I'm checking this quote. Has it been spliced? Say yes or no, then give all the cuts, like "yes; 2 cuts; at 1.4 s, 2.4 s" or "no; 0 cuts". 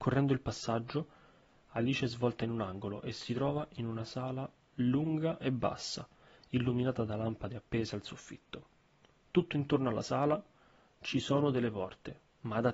no; 0 cuts